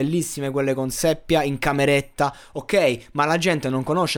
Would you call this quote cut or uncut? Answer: uncut